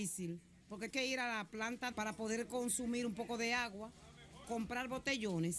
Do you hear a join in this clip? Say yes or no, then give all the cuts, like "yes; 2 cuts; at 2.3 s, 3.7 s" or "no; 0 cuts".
yes; 3 cuts; at 0.9 s, 1.9 s, 4.4 s